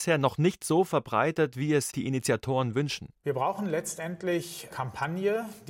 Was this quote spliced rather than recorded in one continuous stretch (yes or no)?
yes